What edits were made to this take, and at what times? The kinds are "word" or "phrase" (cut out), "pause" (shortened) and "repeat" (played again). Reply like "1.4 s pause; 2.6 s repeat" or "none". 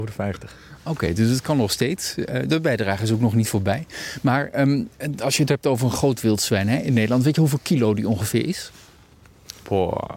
none